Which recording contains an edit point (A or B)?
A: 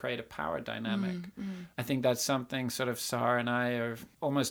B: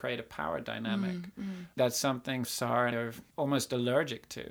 B